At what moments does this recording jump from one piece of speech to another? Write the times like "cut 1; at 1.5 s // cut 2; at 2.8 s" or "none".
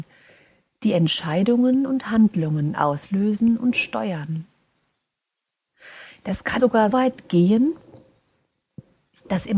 cut 1; at 6.6 s // cut 2; at 6.9 s